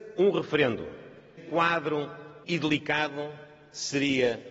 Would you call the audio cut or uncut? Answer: cut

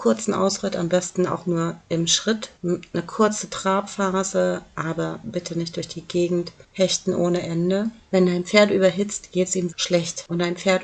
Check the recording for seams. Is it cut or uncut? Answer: cut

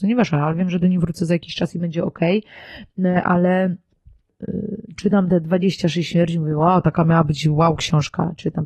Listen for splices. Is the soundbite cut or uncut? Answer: uncut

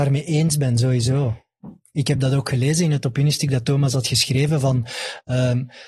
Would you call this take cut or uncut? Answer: uncut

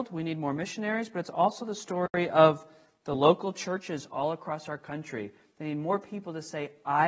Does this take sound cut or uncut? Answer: uncut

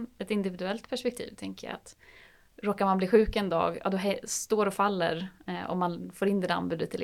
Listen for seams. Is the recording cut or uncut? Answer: uncut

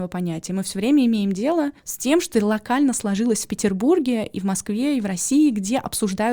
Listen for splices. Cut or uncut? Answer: cut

